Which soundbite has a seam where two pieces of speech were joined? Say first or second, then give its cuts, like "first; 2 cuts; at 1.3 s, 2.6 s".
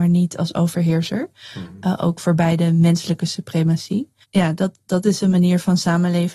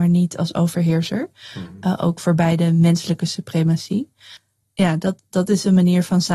first; 1 cut; at 4.2 s